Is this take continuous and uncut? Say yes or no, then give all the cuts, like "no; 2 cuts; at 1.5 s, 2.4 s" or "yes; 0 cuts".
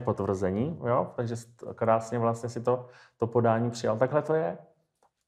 yes; 0 cuts